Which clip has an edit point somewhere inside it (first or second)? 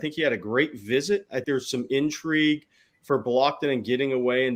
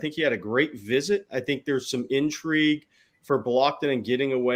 first